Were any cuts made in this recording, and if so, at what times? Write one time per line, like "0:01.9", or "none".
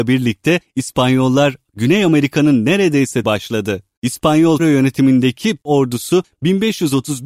0:03.2
0:04.6